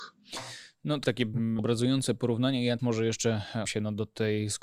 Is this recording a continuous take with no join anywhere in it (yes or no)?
no